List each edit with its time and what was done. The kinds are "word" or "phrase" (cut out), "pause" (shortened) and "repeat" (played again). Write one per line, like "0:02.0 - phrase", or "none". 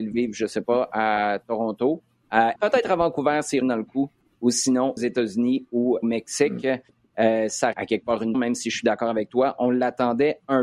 0:02.6 - word
0:03.6 - word
0:05.0 - word
0:06.0 - word
0:07.7 - word
0:08.3 - word